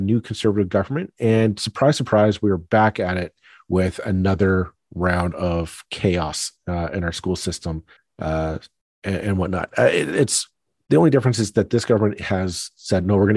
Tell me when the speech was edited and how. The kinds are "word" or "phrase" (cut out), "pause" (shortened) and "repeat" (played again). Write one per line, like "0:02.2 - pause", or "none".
none